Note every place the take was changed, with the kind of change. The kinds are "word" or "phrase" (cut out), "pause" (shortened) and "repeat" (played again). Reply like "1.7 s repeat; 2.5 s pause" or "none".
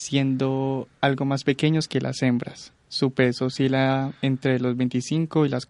none